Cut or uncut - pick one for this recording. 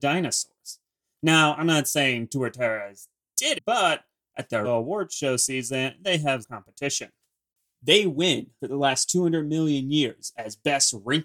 cut